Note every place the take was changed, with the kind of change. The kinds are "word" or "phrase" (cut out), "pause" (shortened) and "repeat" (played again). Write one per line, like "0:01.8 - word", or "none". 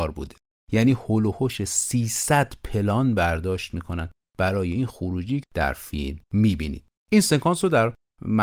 0:05.4 - word
0:06.2 - pause